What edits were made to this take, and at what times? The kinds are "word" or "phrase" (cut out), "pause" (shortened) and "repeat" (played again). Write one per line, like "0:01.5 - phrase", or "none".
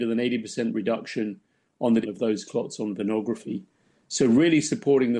0:02.0 - word